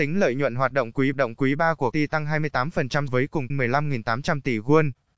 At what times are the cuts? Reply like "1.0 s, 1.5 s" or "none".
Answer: 1.1 s, 1.9 s, 3.1 s, 3.5 s